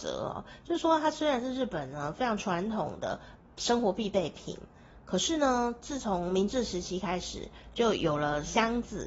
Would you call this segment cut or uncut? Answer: uncut